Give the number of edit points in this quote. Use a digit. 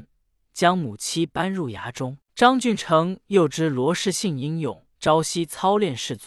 2